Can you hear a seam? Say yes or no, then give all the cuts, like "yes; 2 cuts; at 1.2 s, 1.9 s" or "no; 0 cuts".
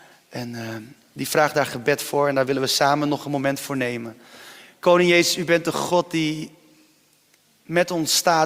no; 0 cuts